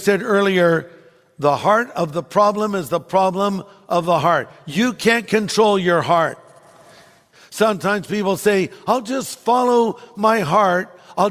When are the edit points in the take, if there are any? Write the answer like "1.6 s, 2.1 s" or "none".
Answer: none